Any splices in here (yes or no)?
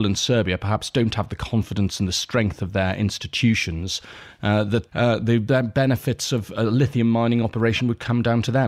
yes